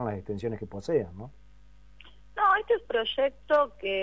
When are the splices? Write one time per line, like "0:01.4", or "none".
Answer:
0:02.8

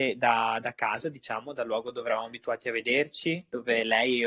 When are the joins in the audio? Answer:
none

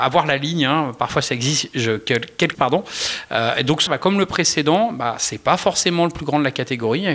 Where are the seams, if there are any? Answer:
0:02.5
0:03.9

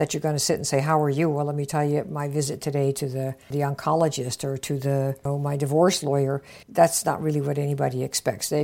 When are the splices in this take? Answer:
0:06.6

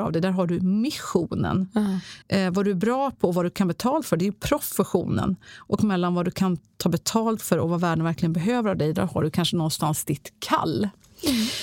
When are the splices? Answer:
0:02.2

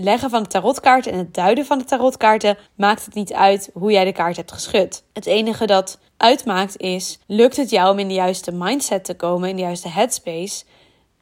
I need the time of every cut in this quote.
0:02.7
0:05.1
0:06.1
0:07.2

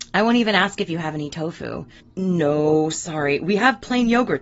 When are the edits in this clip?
0:02.0

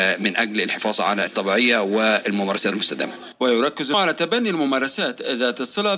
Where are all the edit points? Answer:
0:01.3
0:02.7
0:03.9

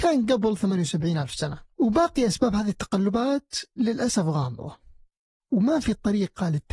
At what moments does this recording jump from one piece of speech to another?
0:01.7
0:03.7

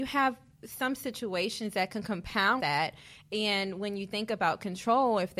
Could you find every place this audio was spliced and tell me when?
0:02.6

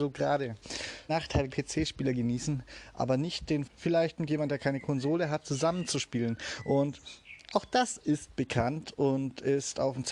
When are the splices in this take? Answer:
0:01.1
0:01.5
0:03.7

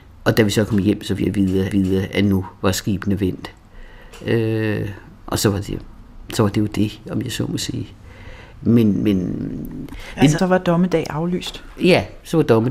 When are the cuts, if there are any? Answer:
0:01.2
0:01.7
0:08.5
0:10.4

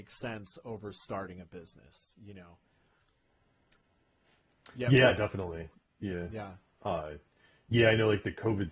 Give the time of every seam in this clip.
none

